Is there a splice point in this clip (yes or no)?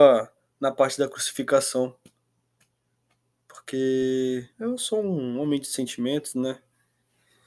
yes